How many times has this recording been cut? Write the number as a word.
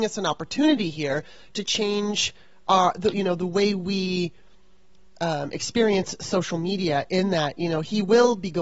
zero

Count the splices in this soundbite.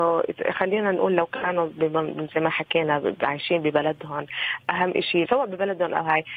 one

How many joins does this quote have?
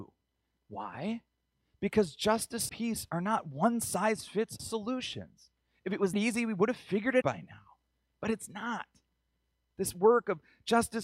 four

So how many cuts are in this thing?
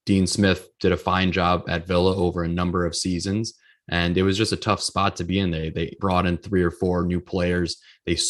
one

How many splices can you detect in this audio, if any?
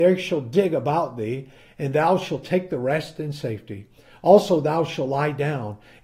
zero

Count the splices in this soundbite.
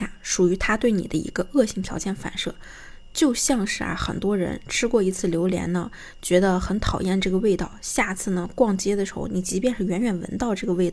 zero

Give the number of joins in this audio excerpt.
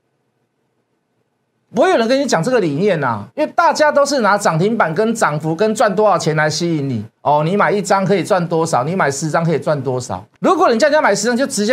three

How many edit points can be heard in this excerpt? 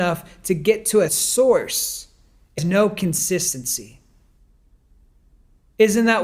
two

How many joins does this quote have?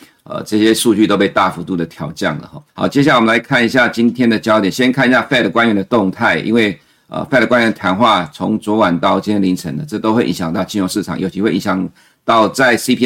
one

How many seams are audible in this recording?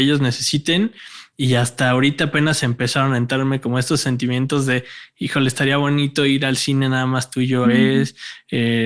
one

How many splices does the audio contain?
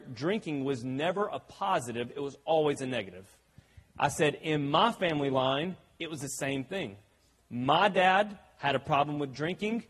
zero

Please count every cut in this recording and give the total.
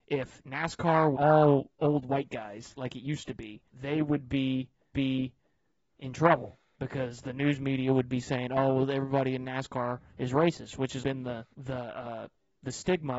six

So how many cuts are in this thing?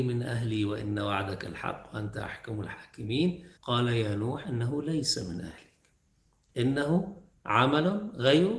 one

